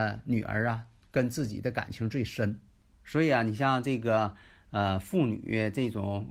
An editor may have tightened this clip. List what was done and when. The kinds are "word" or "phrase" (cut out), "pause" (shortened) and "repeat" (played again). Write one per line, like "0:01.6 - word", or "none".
none